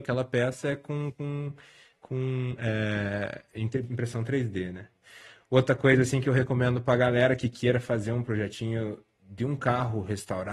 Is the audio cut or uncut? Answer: uncut